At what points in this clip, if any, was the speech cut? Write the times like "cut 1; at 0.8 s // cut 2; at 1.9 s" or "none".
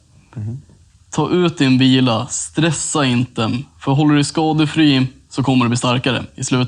none